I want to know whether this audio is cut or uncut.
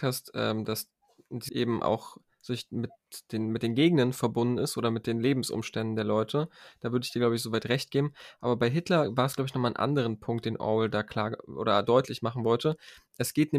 cut